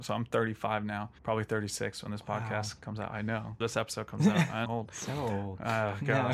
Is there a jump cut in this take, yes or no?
yes